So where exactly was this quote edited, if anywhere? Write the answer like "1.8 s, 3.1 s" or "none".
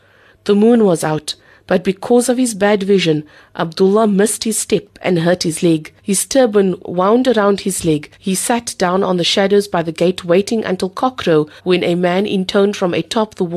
6.0 s, 8.1 s, 11.6 s